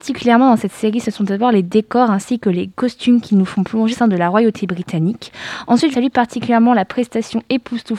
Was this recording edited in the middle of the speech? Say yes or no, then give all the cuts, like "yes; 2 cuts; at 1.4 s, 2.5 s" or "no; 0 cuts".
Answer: yes; 2 cuts; at 3.9 s, 5.9 s